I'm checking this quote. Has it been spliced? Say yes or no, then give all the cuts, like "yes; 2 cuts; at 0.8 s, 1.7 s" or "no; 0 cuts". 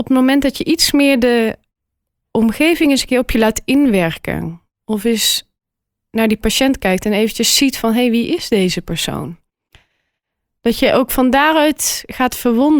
no; 0 cuts